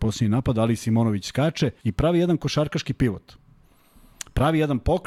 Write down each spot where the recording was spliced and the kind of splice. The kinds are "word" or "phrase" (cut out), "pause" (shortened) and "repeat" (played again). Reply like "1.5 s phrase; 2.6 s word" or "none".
1.8 s pause

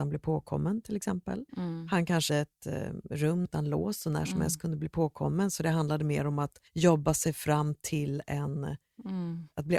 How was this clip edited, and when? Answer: 1.5 s pause; 2.3 s word; 3.4 s phrase; 6.7 s pause

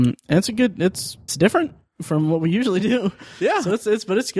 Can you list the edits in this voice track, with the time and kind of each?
1.3 s word

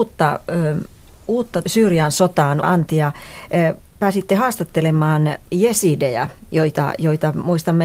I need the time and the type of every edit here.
1.6 s word; 2.6 s word; 5.5 s pause

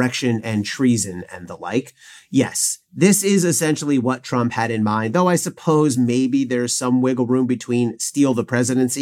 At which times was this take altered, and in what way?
none

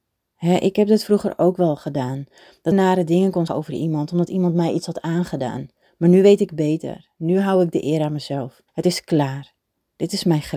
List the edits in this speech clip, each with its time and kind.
2.7 s phrase; 3.5 s word; 8.7 s pause

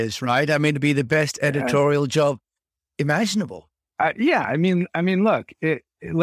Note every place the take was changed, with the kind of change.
none

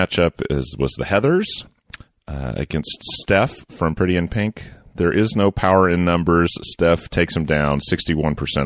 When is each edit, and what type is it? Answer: none

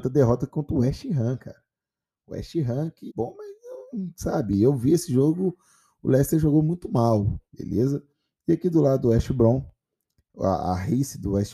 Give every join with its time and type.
3.1 s phrase; 7.5 s pause

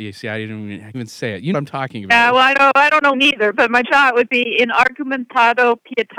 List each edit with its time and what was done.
0.9 s word; 1.5 s word; 2.5 s word; 3.1 s word; 3.8 s word

